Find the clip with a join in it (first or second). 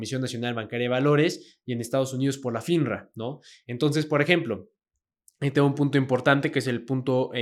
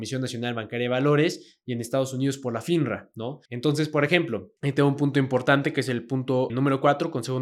second